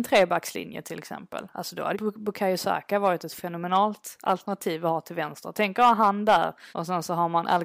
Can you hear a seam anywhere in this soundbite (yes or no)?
yes